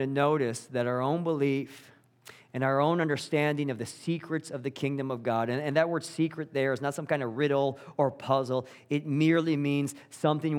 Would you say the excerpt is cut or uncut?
uncut